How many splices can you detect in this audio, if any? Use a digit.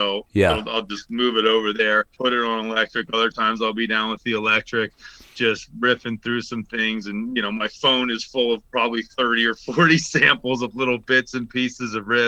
2